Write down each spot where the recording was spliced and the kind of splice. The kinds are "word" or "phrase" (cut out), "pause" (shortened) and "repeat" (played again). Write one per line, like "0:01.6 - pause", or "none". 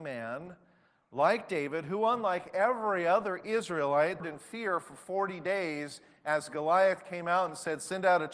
0:04.2 - phrase